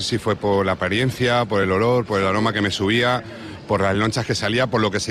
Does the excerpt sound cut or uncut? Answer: uncut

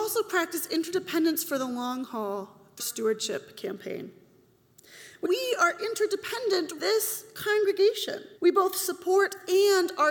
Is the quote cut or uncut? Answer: cut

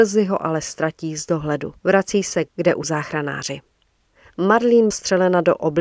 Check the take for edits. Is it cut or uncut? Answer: cut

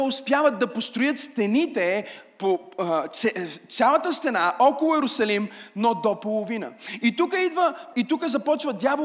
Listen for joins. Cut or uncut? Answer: cut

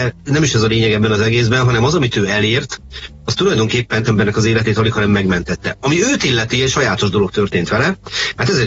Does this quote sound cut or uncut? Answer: cut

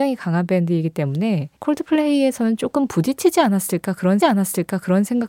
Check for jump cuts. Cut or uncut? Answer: cut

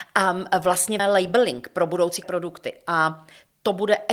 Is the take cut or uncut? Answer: cut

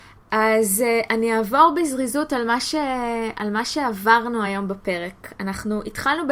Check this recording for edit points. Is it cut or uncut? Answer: uncut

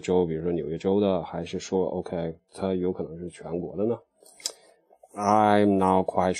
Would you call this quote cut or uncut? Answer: uncut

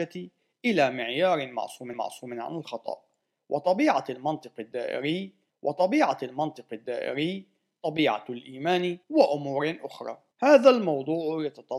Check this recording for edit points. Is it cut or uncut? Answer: cut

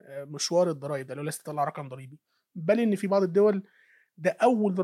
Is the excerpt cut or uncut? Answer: uncut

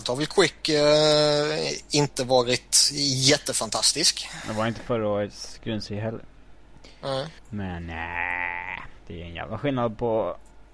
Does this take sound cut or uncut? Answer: cut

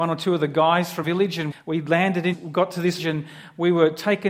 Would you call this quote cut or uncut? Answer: cut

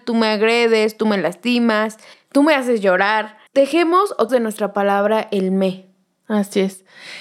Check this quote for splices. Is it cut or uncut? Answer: cut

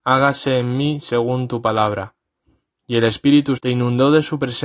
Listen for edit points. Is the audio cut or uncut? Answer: cut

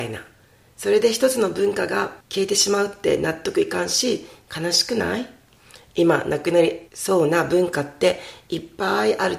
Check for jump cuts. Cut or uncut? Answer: cut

